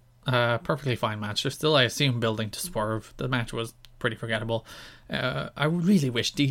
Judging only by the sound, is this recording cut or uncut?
uncut